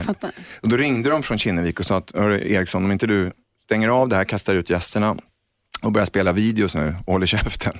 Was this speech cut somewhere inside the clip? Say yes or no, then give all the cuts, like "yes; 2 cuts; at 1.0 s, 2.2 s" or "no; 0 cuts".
no; 0 cuts